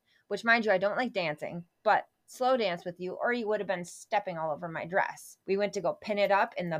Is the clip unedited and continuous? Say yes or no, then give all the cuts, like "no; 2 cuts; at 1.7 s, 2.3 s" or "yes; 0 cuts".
no; 1 cut; at 5.4 s